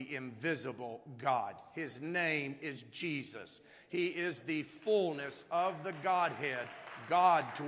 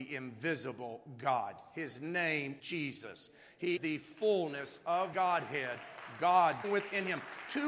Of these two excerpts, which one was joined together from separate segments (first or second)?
second